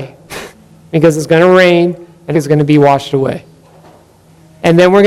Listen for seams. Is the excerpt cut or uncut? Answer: cut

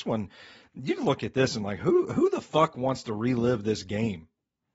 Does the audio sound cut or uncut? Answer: uncut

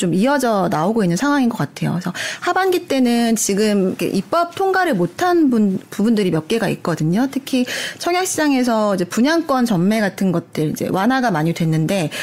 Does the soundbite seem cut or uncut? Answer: uncut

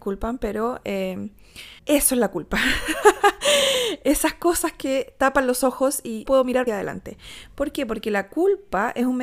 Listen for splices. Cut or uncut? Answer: cut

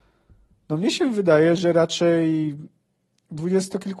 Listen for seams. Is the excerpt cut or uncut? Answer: uncut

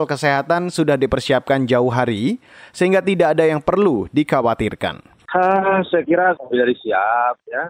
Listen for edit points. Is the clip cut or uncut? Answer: cut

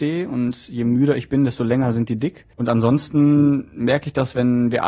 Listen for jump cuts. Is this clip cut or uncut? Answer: cut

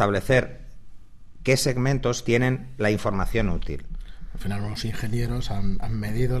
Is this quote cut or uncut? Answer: uncut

